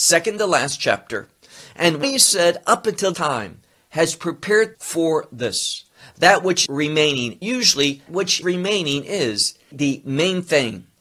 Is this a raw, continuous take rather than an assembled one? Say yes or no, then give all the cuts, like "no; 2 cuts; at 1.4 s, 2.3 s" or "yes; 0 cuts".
no; 8 cuts; at 2.0 s, 3.1 s, 4.7 s, 6.7 s, 7.4 s, 8.1 s, 8.4 s, 9.7 s